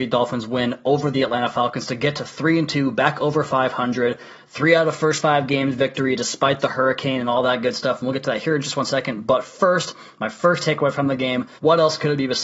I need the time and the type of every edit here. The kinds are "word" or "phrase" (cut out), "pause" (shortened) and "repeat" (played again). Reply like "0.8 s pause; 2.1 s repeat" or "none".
11.6 s pause

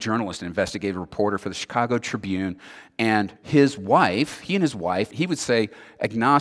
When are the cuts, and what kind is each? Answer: 3.4 s pause; 5.1 s word

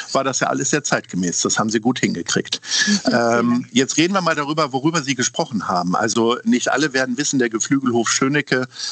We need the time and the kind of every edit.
none

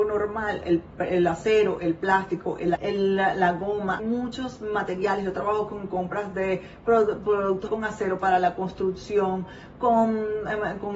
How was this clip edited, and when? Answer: 2.8 s word; 4.0 s word; 7.7 s phrase

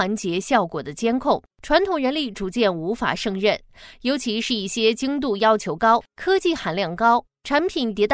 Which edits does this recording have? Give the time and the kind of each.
1.5 s pause

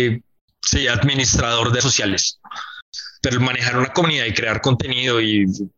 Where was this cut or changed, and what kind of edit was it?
1.8 s word

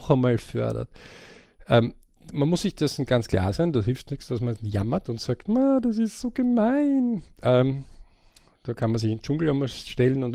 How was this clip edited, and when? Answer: none

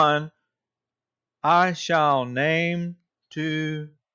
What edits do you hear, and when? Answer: none

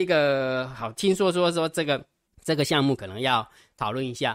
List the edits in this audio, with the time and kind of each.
2.3 s pause

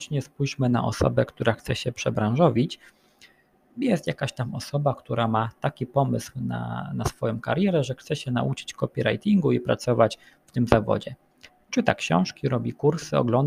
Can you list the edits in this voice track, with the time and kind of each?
none

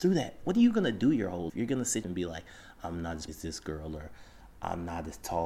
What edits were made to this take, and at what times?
1.5 s word; 2.0 s phrase; 3.3 s word

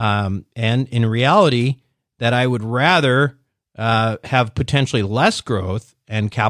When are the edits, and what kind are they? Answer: none

